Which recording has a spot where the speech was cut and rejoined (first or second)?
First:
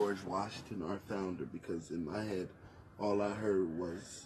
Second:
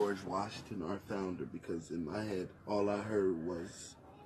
second